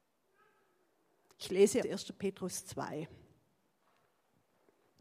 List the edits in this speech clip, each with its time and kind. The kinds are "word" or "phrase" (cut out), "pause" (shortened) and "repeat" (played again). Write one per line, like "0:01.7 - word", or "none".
0:01.8 - word